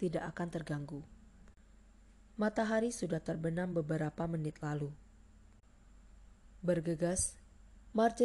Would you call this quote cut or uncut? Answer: uncut